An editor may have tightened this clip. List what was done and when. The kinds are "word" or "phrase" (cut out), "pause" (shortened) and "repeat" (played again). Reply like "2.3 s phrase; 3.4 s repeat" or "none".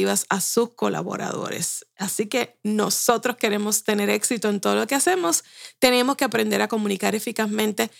none